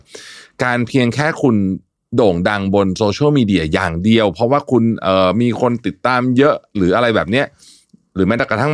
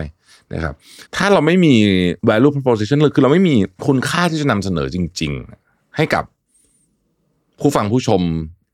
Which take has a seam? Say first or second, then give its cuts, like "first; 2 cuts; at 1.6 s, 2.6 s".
second; 3 cuts; at 1.1 s, 2.2 s, 3.8 s